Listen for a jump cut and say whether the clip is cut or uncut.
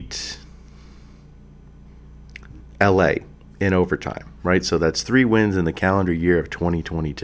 uncut